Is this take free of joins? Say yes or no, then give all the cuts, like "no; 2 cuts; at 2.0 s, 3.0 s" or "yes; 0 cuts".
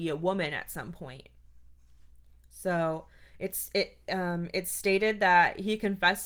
yes; 0 cuts